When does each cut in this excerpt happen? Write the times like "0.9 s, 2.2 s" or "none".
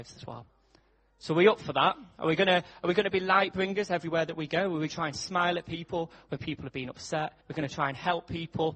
4.9 s, 6.4 s, 7.4 s